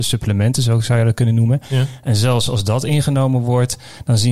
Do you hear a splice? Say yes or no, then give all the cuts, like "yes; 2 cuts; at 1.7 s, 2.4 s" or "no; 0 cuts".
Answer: no; 0 cuts